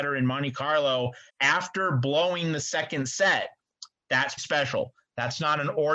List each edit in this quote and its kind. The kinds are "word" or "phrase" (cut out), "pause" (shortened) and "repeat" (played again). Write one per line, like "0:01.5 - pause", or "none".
0:01.3 - pause
0:04.4 - word

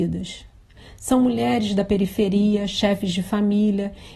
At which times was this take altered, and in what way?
none

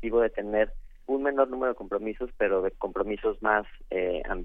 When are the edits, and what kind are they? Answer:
none

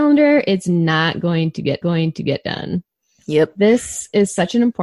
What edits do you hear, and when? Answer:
0:01.8 - repeat

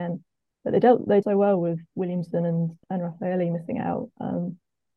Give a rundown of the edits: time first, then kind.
0:01.2 - word
0:02.8 - pause

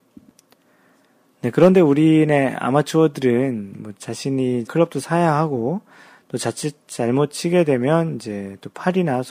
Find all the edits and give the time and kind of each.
0:04.7 - word

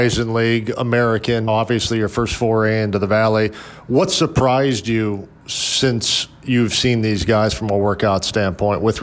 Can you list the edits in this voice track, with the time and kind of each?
0:01.5 - word

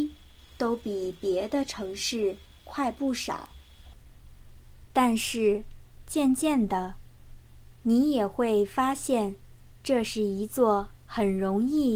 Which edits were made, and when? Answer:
none

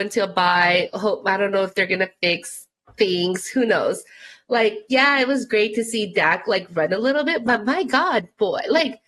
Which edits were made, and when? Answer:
none

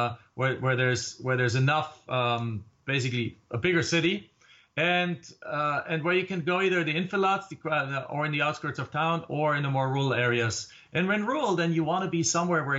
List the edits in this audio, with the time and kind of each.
none

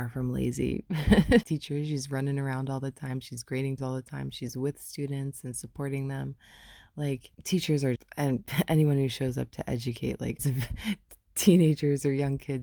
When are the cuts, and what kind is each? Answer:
0:01.4 - phrase
0:03.8 - word
0:07.3 - pause
0:08.0 - word
0:10.4 - word

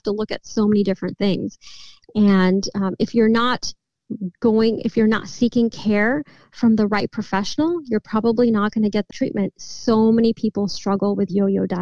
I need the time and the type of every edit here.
0:09.1 - word

